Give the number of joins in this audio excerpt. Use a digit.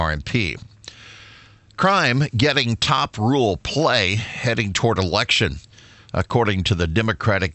0